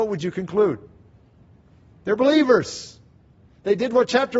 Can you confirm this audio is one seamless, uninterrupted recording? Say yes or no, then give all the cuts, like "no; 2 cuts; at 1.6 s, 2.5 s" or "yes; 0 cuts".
yes; 0 cuts